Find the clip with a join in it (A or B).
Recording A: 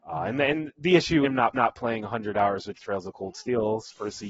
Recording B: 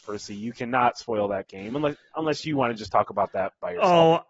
A